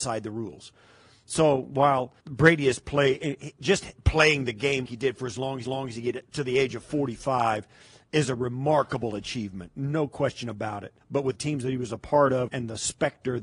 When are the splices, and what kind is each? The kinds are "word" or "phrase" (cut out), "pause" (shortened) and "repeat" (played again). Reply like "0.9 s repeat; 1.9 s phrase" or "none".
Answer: 2.2 s pause; 3.6 s word; 4.9 s word; 5.6 s repeat; 11.0 s pause; 11.3 s phrase; 12.5 s word

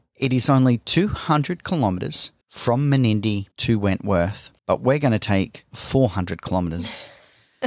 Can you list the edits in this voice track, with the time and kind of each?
2.4 s pause; 3.5 s pause; 4.6 s pause

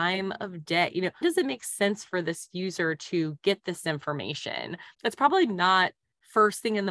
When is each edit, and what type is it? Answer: 1.2 s word; 4.9 s pause

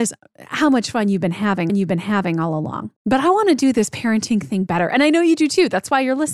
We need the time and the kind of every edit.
1.7 s repeat; 3.0 s pause

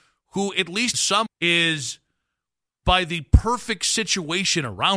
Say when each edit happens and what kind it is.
0.9 s word; 1.3 s word; 2.8 s word

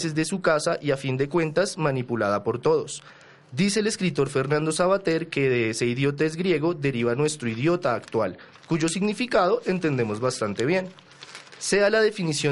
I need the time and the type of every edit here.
none

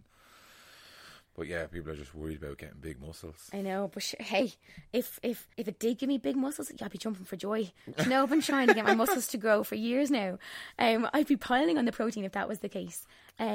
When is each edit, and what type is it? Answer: 5.5 s pause

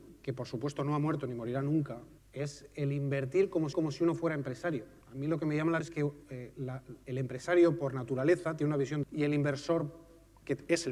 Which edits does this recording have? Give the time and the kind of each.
2.2 s word; 3.7 s repeat; 5.0 s pause; 5.8 s word; 9.0 s phrase

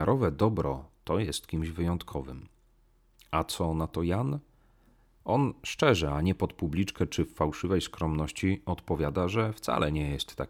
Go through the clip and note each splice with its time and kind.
none

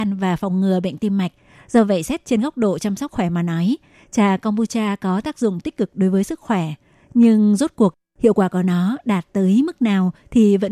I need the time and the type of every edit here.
3.1 s word

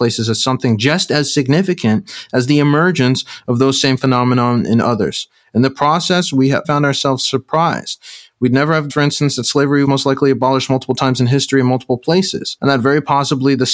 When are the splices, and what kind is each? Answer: 6.6 s word; 8.9 s word; 9.8 s word

